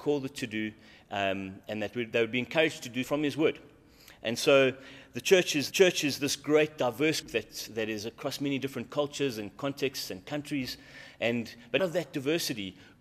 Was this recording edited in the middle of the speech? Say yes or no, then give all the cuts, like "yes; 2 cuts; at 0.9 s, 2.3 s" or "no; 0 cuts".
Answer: yes; 4 cuts; at 3.0 s, 5.7 s, 7.2 s, 11.8 s